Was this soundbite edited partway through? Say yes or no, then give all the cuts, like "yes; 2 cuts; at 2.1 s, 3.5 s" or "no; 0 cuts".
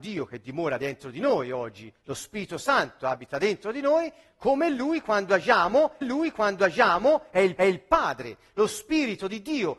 yes; 2 cuts; at 6.0 s, 7.6 s